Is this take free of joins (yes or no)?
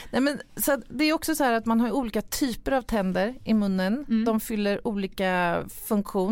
yes